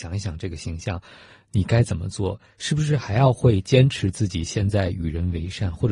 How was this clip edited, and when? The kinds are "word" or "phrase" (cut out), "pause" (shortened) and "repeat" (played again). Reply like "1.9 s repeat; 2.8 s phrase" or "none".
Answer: none